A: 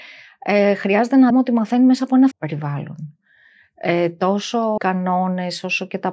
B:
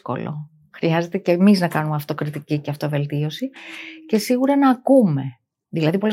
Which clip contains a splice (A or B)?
A